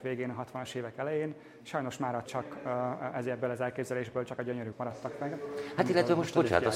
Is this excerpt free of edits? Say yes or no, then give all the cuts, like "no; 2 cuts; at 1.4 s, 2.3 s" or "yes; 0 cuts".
no; 3 cuts; at 2.3 s, 4.4 s, 4.7 s